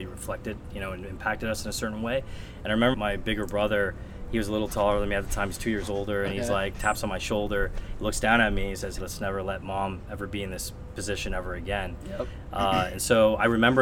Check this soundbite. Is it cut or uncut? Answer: cut